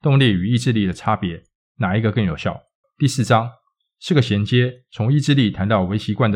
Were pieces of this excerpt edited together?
yes; 1 cut; at 2.8 s

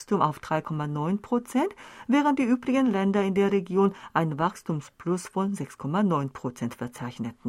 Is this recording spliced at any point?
no; 0 cuts

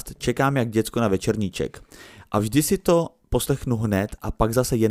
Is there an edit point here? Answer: no; 0 cuts

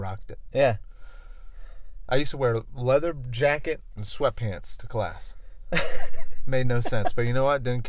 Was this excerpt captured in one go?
yes; 0 cuts

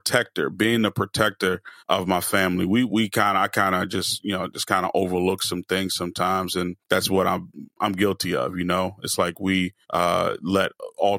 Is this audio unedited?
no; 3 cuts; at 1.8 s, 6.8 s, 9.8 s

